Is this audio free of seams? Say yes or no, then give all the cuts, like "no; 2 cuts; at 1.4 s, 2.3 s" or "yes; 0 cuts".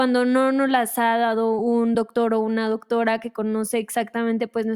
yes; 0 cuts